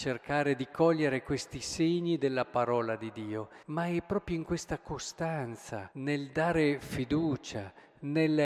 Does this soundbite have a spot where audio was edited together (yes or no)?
yes